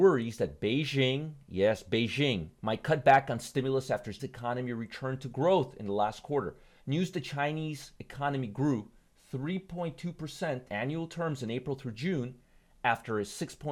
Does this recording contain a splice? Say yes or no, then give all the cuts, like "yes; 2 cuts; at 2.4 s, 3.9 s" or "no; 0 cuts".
yes; 3 cuts; at 2.6 s, 4.2 s, 10.7 s